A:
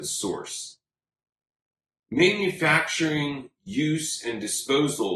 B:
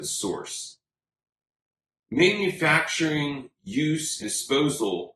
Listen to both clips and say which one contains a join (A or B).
B